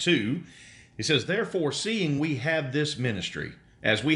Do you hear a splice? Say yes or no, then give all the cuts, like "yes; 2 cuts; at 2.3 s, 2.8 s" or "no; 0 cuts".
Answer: no; 0 cuts